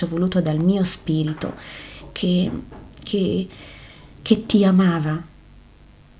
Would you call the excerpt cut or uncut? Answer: uncut